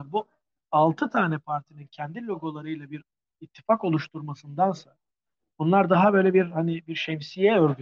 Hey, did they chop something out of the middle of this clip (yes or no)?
no